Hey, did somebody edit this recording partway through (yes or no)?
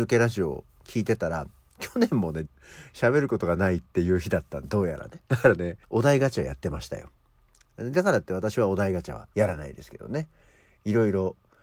yes